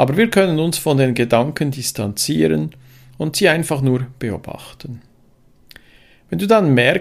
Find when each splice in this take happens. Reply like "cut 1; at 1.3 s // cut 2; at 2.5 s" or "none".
none